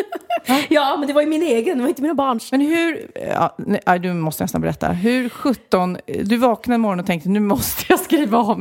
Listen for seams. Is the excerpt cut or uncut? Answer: uncut